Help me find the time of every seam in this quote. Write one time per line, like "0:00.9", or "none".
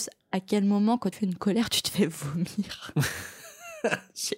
0:01.1

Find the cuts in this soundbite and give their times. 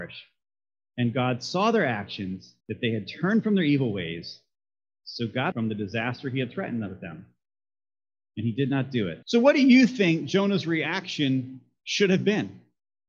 0:02.6
0:05.5
0:09.2

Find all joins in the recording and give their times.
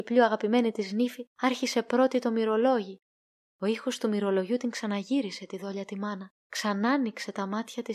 0:01.3
0:03.3
0:06.4

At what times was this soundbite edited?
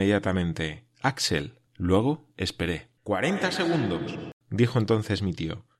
0:01.7
0:03.0
0:04.4

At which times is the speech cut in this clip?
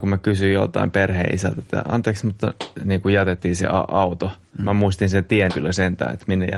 0:02.7
0:05.5

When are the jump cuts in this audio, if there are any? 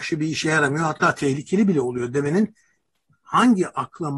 none

